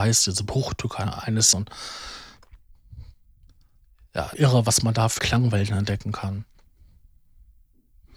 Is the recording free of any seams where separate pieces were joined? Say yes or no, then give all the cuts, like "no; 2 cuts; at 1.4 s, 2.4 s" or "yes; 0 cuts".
no; 3 cuts; at 1.5 s, 4.3 s, 5.2 s